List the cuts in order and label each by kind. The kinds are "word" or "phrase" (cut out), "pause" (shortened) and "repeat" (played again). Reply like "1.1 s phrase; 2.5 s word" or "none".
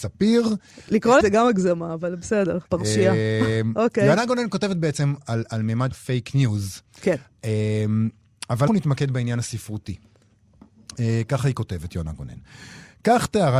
1.2 s phrase; 2.7 s pause; 5.9 s word; 8.7 s word